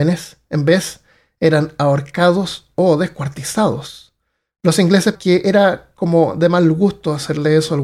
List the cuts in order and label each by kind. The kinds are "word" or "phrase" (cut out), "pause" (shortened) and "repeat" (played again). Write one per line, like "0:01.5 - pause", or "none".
0:05.1 - word